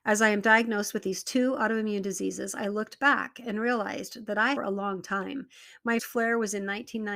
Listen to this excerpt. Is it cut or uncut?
cut